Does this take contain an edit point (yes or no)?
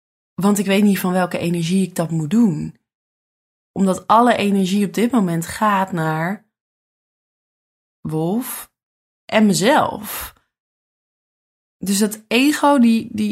no